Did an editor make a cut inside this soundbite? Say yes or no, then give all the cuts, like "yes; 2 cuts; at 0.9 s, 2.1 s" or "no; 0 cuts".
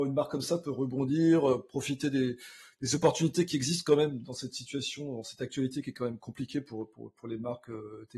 no; 0 cuts